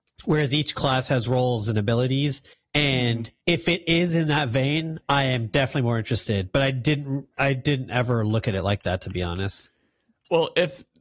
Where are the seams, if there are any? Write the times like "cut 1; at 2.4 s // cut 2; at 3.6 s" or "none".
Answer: cut 1; at 2.5 s // cut 2; at 3.4 s